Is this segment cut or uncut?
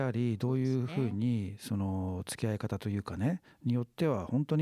uncut